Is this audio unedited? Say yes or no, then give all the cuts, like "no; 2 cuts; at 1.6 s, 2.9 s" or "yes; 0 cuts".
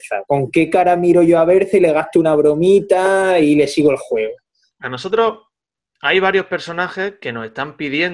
yes; 0 cuts